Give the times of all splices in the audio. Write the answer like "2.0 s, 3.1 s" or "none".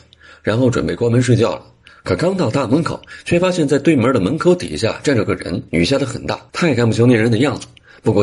5.7 s, 6.5 s